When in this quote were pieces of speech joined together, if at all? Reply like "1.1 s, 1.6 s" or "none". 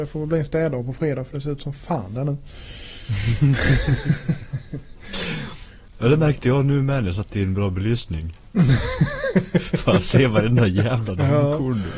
none